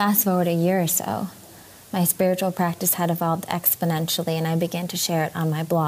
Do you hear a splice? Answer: no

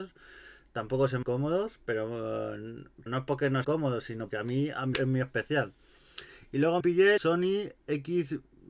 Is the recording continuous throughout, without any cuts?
no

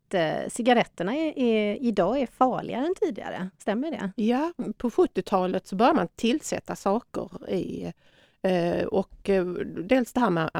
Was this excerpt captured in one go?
no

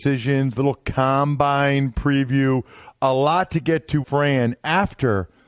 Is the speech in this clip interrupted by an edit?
yes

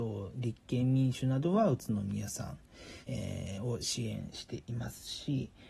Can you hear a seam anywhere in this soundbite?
yes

